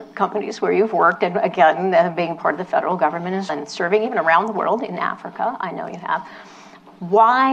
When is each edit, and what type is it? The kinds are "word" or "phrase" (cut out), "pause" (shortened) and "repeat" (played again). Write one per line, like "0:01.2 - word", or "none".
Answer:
0:03.5 - word